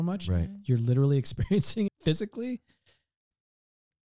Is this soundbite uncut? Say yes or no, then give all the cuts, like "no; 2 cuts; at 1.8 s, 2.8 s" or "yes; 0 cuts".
no; 1 cut; at 1.9 s